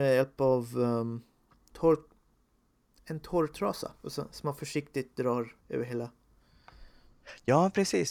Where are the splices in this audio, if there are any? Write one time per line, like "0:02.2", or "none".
0:01.7
0:04.0
0:05.6